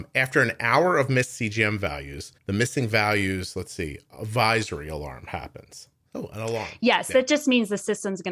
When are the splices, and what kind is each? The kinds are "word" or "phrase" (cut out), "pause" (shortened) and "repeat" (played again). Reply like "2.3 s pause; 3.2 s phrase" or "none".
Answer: 2.4 s pause

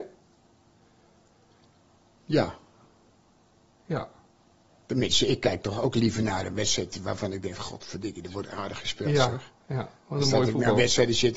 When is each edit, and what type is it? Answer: none

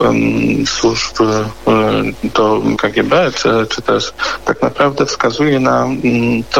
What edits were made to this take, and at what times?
2.3 s word; 2.8 s word; 4.4 s word

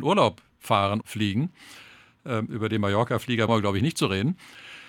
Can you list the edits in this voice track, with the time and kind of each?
1.0 s word; 3.5 s word

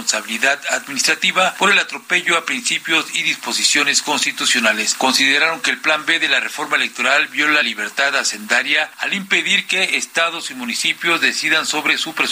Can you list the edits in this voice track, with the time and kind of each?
7.6 s phrase

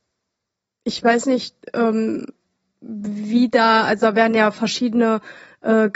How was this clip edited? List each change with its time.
none

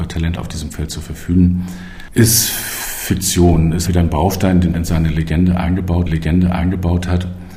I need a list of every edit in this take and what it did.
3.9 s word; 4.7 s word; 6.1 s repeat

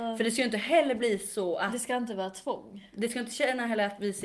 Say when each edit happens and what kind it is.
none

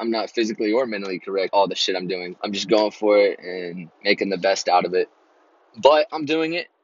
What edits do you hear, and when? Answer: 1.5 s word; 2.4 s pause; 3.9 s pause

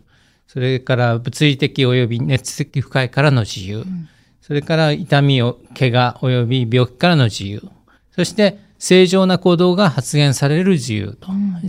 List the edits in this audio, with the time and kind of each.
none

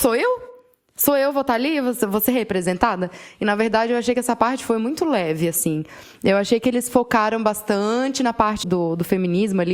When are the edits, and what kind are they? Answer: 8.6 s word

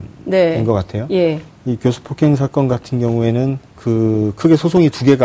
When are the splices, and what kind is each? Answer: 3.7 s pause

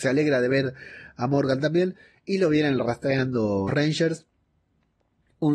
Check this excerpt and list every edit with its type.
3.7 s word

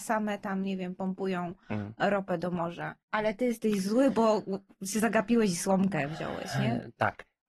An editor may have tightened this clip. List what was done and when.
3.0 s pause

